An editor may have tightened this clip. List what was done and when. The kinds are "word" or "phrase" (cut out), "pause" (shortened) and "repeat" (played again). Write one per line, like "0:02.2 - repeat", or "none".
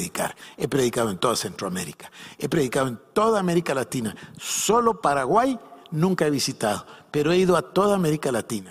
none